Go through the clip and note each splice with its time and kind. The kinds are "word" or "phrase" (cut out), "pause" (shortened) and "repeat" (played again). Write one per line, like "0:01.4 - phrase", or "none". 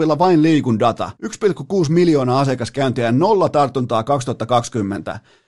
0:01.2 - pause